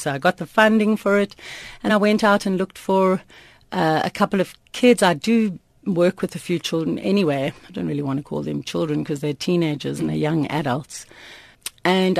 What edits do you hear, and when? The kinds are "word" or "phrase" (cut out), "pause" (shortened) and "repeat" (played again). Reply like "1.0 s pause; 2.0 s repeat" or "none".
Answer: 1.9 s word